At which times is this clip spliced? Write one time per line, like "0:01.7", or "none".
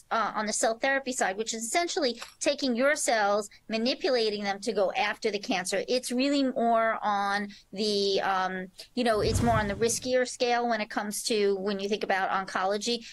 none